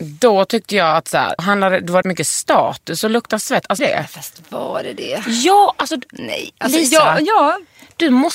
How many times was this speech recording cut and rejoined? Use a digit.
3